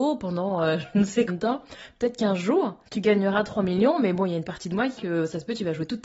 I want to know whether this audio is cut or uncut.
cut